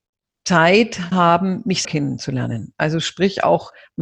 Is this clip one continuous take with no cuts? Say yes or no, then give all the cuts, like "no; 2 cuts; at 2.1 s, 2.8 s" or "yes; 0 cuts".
no; 2 cuts; at 1.1 s, 1.8 s